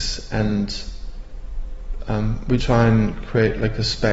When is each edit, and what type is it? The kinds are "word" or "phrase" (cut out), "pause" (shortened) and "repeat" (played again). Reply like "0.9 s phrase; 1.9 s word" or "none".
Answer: 2.6 s word